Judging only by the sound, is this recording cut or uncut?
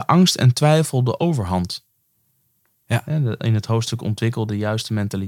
uncut